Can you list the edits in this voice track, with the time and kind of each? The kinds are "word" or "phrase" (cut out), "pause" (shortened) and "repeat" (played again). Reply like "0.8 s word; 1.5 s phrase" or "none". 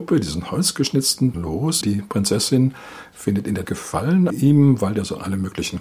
1.3 s word; 1.8 s word; 3.7 s word; 4.3 s word